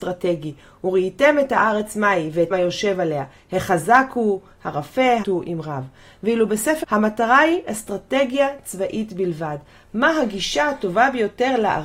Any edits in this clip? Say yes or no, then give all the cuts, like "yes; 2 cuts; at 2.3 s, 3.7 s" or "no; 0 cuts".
yes; 3 cuts; at 2.5 s, 5.2 s, 6.8 s